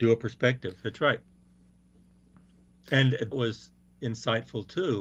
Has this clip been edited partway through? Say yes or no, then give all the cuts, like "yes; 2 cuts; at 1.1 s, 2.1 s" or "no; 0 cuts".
yes; 1 cut; at 3.3 s